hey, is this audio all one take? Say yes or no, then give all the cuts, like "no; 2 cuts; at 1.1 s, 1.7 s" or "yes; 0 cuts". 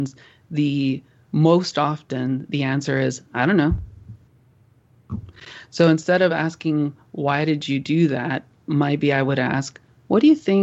yes; 0 cuts